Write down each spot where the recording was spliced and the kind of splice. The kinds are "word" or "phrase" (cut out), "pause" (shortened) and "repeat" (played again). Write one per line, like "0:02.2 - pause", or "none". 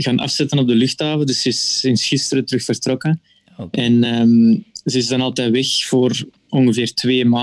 none